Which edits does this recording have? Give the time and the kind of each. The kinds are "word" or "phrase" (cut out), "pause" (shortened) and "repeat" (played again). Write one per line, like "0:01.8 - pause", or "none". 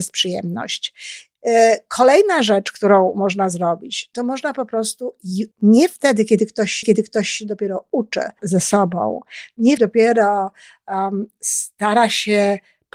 0:05.5 - word
0:06.8 - repeat
0:08.4 - word
0:09.8 - phrase